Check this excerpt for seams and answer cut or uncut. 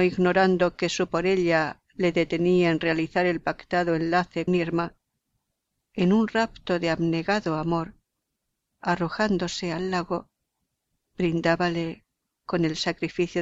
cut